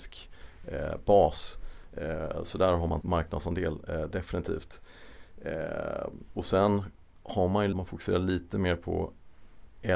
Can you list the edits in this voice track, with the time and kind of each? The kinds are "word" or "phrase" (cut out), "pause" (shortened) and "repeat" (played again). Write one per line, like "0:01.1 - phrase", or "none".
0:03.0 - word
0:07.7 - word